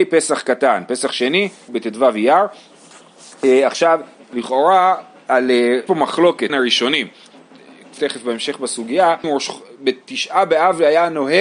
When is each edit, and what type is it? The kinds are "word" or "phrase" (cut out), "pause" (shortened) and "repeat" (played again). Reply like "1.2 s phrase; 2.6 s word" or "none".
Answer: 1.7 s word; 4.2 s word; 5.9 s word; 6.5 s word; 8.0 s word; 9.2 s word